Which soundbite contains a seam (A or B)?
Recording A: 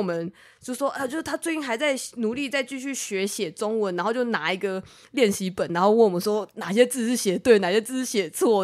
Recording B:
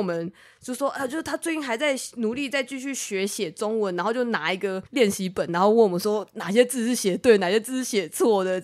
B